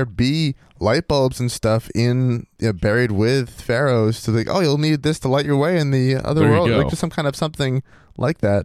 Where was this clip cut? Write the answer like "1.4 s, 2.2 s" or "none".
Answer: 2.5 s